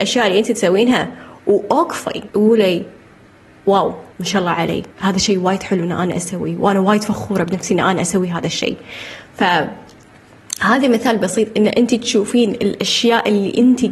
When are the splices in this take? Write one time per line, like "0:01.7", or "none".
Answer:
0:02.3
0:04.1
0:04.9